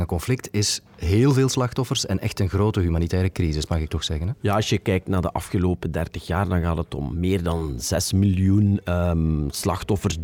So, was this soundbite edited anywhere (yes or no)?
no